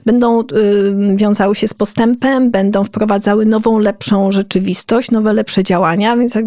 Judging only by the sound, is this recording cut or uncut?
uncut